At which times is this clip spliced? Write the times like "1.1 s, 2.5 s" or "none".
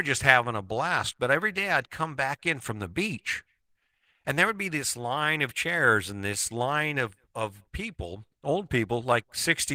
none